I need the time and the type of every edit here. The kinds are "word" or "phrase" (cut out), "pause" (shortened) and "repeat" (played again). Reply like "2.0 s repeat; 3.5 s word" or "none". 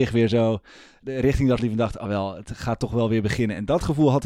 1.0 s word; 1.6 s word; 2.0 s word